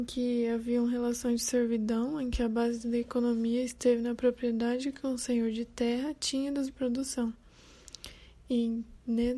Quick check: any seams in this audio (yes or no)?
yes